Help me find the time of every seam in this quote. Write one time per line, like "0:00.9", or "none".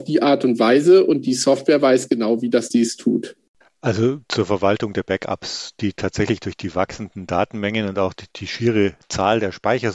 0:02.7
0:03.6